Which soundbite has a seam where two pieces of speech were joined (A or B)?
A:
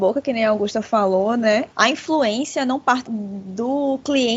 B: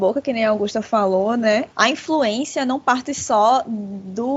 A